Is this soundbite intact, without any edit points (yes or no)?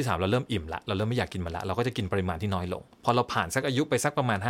no